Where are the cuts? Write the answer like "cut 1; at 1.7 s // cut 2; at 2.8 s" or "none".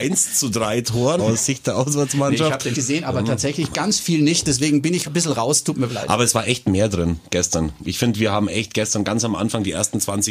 cut 1; at 1.2 s // cut 2; at 2.7 s // cut 3; at 5.0 s // cut 4; at 5.9 s